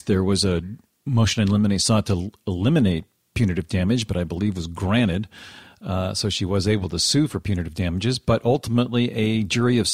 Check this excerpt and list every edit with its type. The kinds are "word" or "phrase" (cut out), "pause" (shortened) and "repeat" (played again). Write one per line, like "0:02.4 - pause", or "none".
none